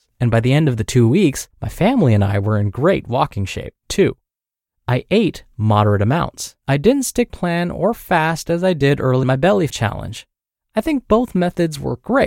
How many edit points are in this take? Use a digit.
6